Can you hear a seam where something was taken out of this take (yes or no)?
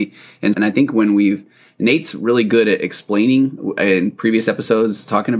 no